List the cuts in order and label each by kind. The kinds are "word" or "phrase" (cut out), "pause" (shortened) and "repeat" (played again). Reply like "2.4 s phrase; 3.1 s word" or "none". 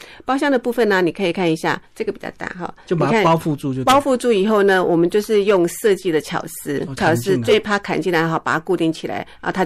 1.9 s pause; 7.0 s phrase